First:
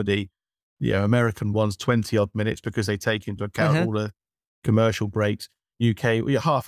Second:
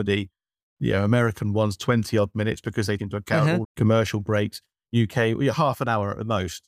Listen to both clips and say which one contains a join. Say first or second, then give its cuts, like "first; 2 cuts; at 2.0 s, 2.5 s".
second; 2 cuts; at 3.0 s, 3.6 s